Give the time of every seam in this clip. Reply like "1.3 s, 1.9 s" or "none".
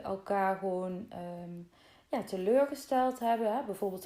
none